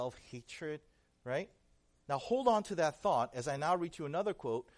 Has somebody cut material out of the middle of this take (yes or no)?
no